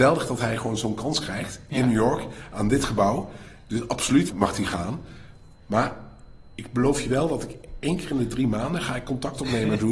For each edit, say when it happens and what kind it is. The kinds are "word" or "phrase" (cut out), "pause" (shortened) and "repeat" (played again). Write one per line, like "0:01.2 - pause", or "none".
0:04.3 - word